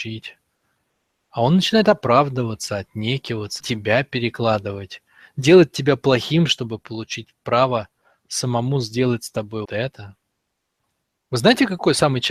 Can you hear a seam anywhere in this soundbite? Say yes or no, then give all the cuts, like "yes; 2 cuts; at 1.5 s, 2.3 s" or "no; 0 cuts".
yes; 2 cuts; at 3.6 s, 9.7 s